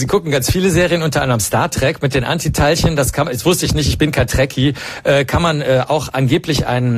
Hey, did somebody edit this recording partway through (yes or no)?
no